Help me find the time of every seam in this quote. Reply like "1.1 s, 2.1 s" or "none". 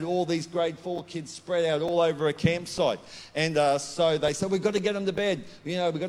none

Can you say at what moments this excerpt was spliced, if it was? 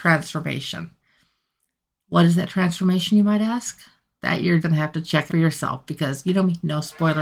4.6 s, 5.3 s

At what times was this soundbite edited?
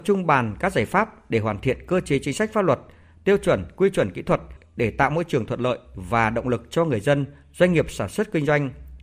none

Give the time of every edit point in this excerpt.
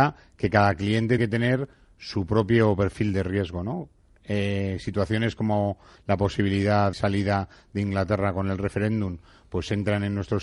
1.2 s, 6.9 s

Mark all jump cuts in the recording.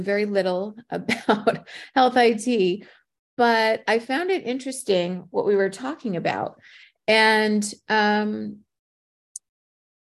none

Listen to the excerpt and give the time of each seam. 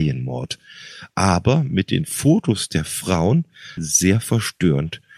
3.8 s

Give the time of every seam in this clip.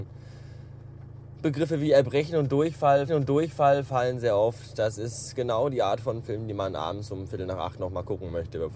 3.1 s

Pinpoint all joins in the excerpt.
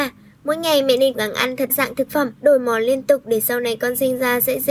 1.1 s, 1.7 s, 2.4 s

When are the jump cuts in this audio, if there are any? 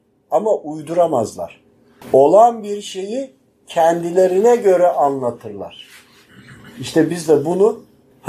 none

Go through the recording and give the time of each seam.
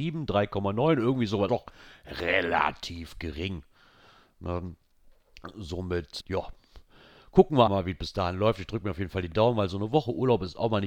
1.5 s, 6.2 s, 7.7 s

